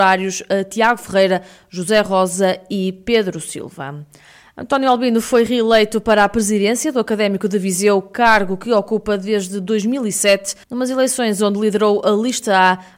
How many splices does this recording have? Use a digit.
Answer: 1